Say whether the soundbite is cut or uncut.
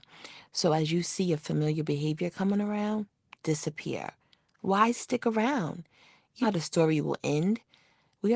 cut